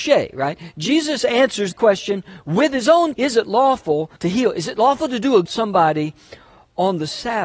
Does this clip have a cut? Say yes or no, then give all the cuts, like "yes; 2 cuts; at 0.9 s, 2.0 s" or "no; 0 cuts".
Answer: yes; 4 cuts; at 1.7 s, 3.1 s, 4.2 s, 5.4 s